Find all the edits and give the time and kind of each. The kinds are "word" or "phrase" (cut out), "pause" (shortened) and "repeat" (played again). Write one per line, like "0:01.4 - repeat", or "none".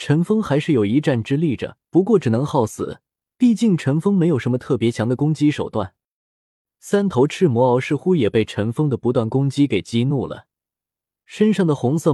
0:01.8 - pause